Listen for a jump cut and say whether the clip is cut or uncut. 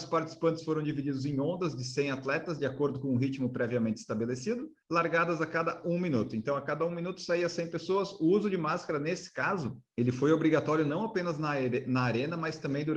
uncut